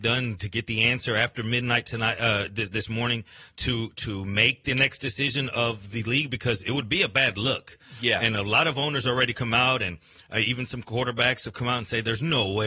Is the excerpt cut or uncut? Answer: uncut